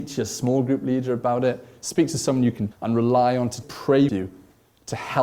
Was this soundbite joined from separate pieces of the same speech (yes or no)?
yes